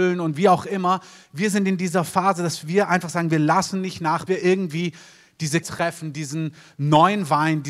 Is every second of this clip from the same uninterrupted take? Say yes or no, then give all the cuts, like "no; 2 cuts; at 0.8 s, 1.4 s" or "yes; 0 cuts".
no; 2 cuts; at 4.3 s, 5.6 s